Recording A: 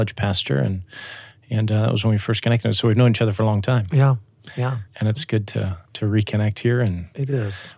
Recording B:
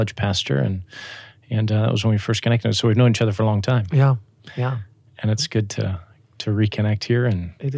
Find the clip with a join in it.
A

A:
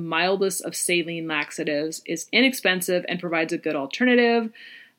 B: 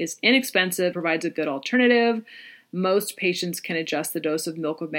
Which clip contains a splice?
B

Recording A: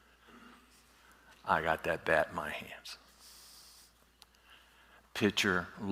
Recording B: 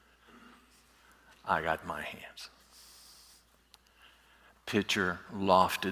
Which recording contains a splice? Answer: B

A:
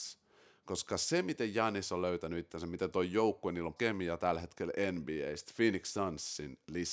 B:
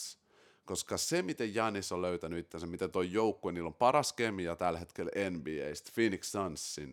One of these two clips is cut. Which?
A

